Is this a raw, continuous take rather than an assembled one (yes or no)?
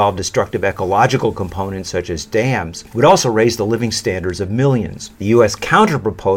no